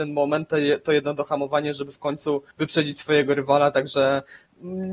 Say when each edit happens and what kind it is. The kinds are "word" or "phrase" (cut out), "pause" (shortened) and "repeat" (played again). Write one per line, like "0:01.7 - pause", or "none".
0:02.5 - pause